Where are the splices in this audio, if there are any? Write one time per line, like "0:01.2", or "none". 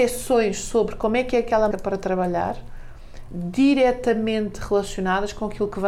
0:01.7
0:03.3